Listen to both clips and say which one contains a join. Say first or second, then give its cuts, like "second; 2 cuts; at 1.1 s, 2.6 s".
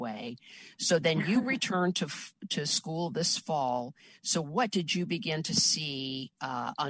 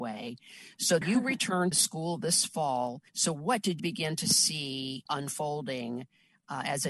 second; 5 cuts; at 1.0 s, 1.7 s, 3.1 s, 3.8 s, 5.1 s